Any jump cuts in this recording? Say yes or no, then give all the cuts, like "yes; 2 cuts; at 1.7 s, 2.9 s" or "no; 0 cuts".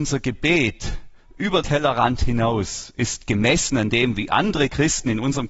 yes; 1 cut; at 1.6 s